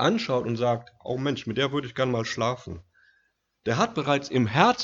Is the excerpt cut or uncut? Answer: uncut